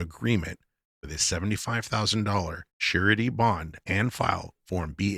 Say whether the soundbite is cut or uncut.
cut